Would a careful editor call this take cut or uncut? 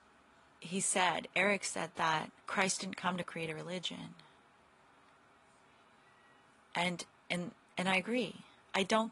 cut